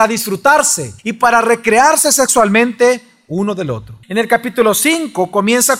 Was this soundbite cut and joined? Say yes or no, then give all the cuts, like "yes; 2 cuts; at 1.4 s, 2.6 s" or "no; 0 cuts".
yes; 2 cuts; at 1.0 s, 4.0 s